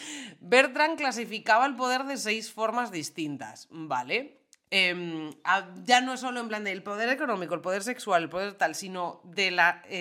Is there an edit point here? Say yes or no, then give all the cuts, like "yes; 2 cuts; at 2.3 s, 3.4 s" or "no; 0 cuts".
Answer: no; 0 cuts